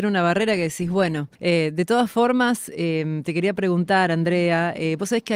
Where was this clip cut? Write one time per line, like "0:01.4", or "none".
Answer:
0:01.4